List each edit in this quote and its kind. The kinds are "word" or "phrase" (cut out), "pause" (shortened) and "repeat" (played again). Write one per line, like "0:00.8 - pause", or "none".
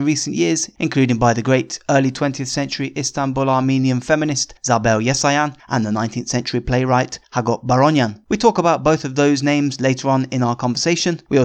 none